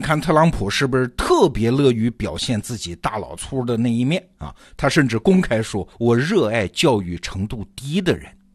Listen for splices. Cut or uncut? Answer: cut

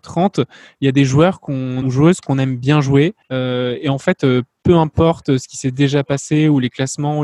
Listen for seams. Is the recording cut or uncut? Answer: cut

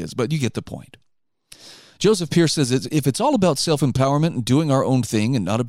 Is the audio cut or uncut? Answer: uncut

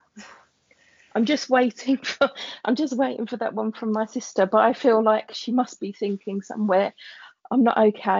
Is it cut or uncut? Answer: uncut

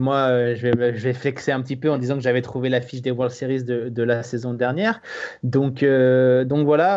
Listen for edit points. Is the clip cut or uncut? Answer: uncut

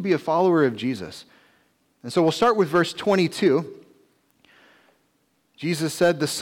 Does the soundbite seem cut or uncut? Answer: uncut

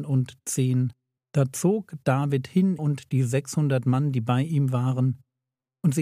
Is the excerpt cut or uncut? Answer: cut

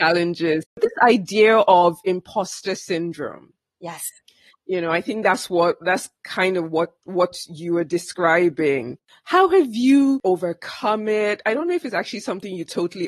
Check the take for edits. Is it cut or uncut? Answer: uncut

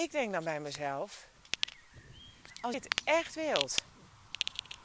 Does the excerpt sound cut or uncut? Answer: cut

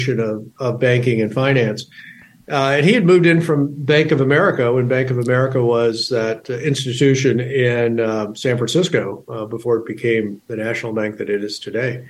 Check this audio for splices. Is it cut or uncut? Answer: uncut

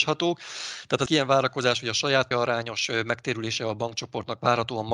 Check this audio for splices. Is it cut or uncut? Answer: cut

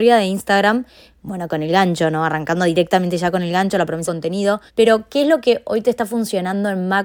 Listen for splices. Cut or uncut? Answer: cut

